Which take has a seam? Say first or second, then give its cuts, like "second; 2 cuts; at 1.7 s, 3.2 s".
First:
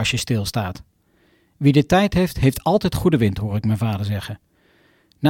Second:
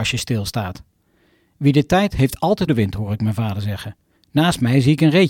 second; 3 cuts; at 2.1 s, 2.7 s, 4.2 s